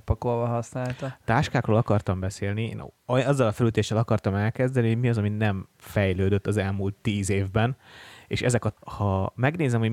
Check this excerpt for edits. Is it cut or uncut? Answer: cut